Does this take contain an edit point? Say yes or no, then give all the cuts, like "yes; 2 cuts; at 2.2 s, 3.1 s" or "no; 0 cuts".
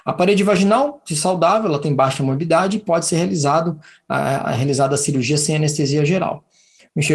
no; 0 cuts